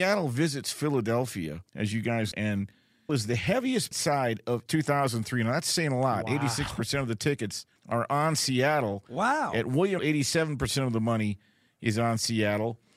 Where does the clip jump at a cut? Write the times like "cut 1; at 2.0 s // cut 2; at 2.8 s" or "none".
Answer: cut 1; at 1.7 s // cut 2; at 2.3 s // cut 3; at 3.1 s // cut 4; at 3.9 s // cut 5; at 4.7 s // cut 6; at 7.8 s // cut 7; at 10.0 s